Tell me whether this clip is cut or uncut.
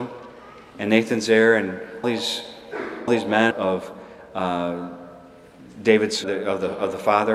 cut